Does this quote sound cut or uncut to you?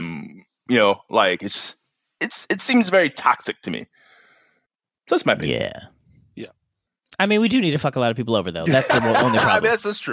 uncut